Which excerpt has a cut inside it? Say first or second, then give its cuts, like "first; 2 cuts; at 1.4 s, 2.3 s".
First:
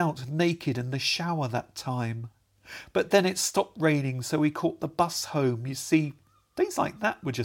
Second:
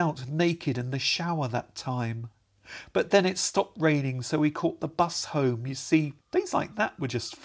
second; 1 cut; at 6.2 s